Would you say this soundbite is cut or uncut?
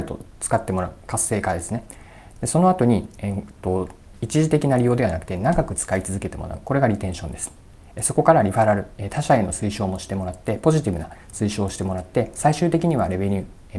uncut